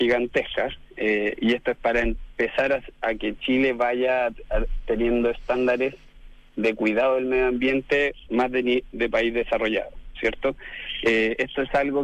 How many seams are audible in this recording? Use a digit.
0